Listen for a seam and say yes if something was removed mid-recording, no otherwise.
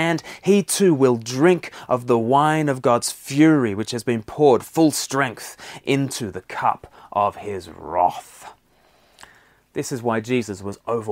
no